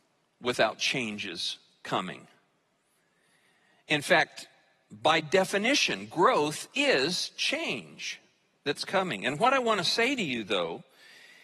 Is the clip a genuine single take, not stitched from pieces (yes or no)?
yes